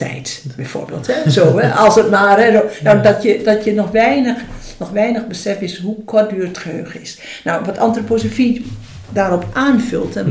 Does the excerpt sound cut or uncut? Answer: uncut